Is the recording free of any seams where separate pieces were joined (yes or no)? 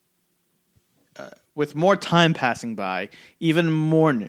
yes